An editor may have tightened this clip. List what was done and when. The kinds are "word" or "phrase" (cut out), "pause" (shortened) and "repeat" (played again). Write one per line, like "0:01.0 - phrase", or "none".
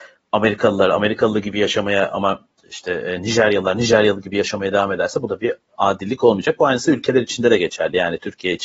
none

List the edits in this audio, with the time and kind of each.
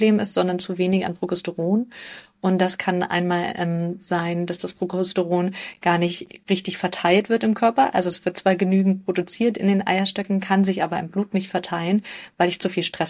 none

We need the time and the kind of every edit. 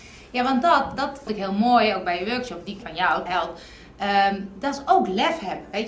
0:01.3 - word
0:02.8 - word
0:03.3 - word

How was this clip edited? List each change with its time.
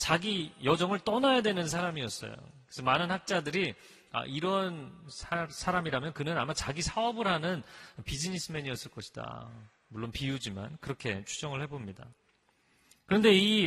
none

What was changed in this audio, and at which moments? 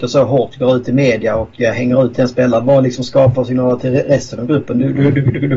0:03.3 - word

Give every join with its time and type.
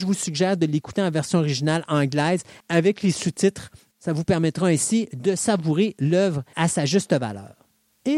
0:06.5 - word

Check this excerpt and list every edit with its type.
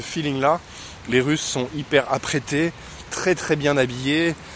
none

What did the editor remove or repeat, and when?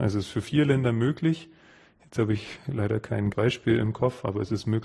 0:03.3 - word

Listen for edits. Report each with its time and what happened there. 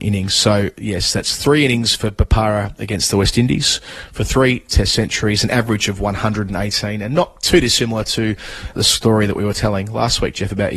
none

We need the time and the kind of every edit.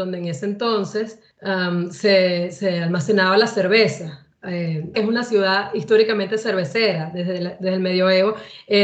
0:01.3 - pause
0:04.9 - word

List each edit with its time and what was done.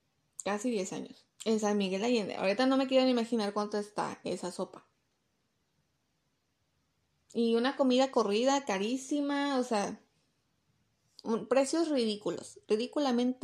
0:01.3 - pause

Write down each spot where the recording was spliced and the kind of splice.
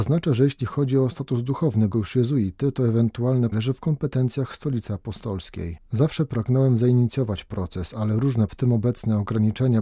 0:01.9 - word
0:03.5 - word
0:08.5 - word

